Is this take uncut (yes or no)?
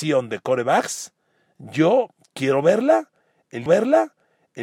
no